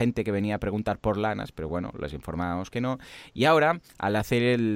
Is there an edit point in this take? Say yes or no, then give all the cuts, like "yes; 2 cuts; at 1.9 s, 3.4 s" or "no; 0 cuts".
no; 0 cuts